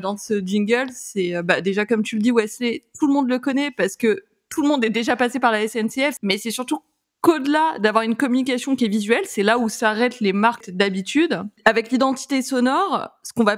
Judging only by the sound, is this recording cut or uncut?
uncut